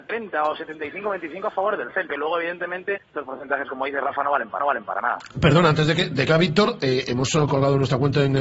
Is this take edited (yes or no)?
yes